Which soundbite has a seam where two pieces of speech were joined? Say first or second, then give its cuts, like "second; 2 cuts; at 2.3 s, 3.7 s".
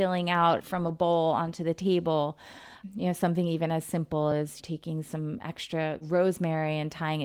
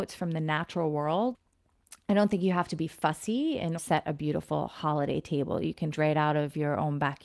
second; 2 cuts; at 3.8 s, 5.9 s